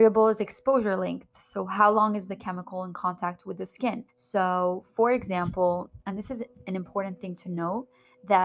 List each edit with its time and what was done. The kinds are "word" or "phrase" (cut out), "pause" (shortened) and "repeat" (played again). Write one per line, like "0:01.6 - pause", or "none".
0:04.1 - pause